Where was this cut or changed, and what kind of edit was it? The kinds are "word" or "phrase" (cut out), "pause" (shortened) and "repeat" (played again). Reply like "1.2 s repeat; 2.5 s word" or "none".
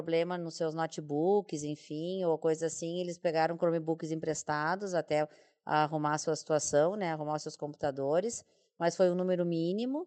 none